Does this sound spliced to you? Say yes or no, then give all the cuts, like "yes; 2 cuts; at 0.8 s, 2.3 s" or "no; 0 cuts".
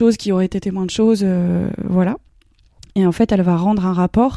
no; 0 cuts